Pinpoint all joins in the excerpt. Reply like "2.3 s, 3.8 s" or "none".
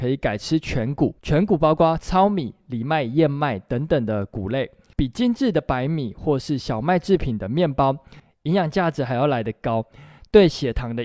1.2 s

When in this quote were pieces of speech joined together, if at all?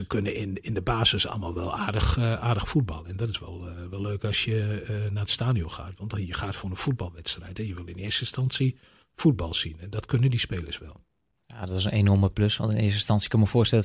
none

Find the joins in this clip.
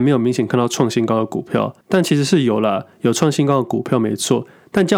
1.8 s

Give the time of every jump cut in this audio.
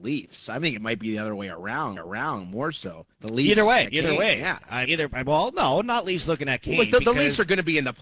2.0 s, 3.1 s, 3.9 s, 4.9 s

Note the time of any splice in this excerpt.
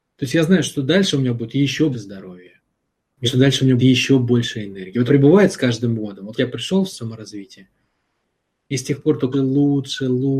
1.9 s, 3.2 s, 3.8 s, 5.1 s, 6.4 s, 6.9 s, 9.3 s

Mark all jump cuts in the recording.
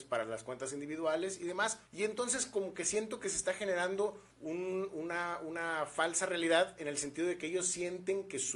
1.9 s, 4.3 s

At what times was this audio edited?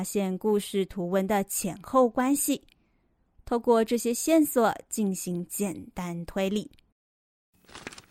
none

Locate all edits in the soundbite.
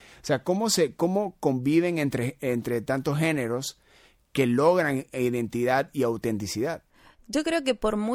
none

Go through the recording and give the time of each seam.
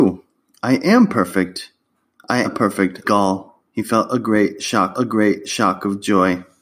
2.4 s, 3.0 s, 3.7 s, 4.9 s

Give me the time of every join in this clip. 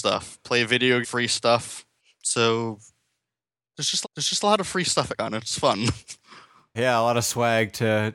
1.0 s, 2.0 s, 4.0 s, 5.2 s, 6.7 s

